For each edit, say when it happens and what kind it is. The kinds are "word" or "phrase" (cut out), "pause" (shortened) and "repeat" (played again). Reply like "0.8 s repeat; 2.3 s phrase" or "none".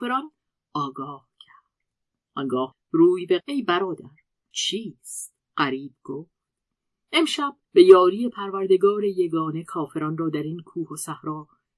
2.7 s word; 3.4 s phrase; 4.5 s word; 5.4 s pause; 7.6 s pause